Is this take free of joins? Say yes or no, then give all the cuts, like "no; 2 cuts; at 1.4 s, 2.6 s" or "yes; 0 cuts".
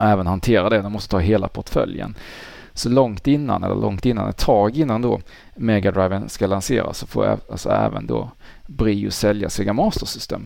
yes; 0 cuts